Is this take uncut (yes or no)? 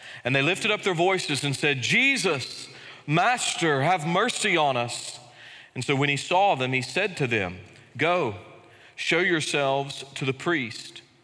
yes